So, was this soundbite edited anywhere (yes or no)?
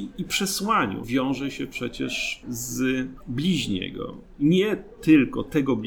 yes